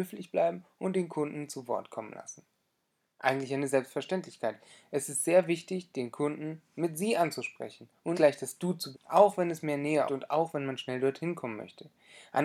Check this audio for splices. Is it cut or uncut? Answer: cut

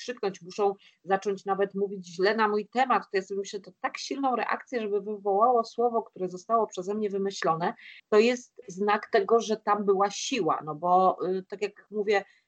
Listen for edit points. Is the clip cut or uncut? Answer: cut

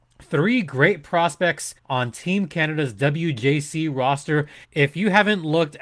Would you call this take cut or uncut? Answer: cut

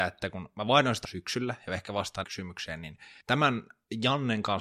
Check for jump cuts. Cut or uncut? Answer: cut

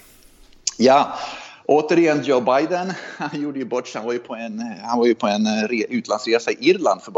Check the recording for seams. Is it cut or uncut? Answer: uncut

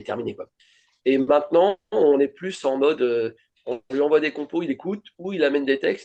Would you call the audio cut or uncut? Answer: uncut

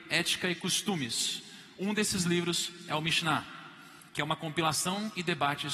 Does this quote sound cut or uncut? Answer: cut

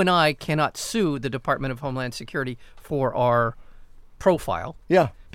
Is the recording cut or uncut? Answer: uncut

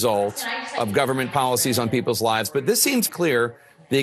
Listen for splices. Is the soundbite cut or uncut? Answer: cut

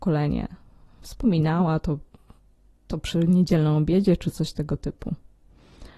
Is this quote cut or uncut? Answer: uncut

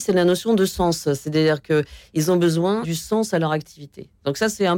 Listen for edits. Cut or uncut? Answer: cut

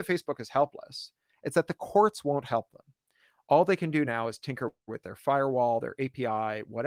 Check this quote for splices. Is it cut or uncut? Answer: uncut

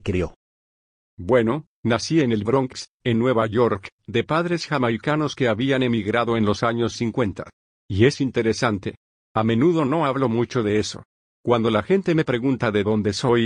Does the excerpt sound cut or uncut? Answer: uncut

